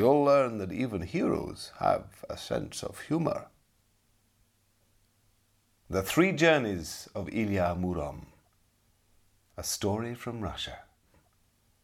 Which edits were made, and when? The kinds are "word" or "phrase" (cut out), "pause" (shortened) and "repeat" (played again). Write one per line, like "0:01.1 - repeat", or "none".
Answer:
none